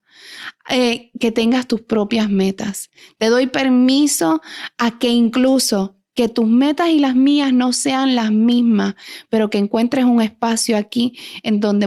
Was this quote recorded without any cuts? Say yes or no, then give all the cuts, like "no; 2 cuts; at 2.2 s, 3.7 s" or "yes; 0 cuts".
yes; 0 cuts